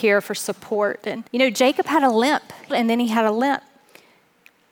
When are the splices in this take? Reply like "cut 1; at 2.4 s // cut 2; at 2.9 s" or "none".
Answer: cut 1; at 1.3 s // cut 2; at 2.7 s